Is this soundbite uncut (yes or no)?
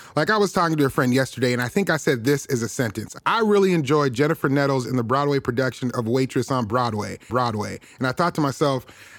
no